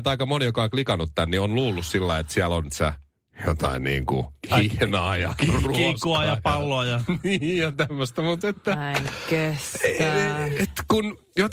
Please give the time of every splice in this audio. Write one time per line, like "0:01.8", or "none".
0:02.7
0:08.4